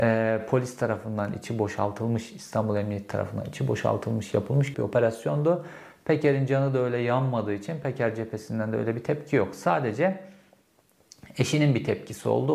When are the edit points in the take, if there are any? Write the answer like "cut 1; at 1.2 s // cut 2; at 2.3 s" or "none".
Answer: cut 1; at 4.7 s

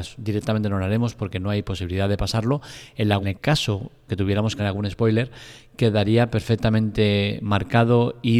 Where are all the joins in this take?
cut 1; at 3.2 s // cut 2; at 4.1 s // cut 3; at 4.6 s

